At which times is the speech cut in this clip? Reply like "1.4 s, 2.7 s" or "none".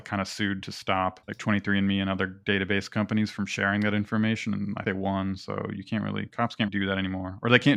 1.2 s, 4.9 s, 6.7 s